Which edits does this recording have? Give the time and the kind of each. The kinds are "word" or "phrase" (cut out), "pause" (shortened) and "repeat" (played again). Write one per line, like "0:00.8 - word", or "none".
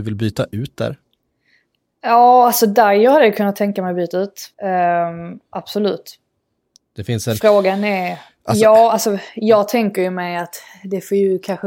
0:04.5 - pause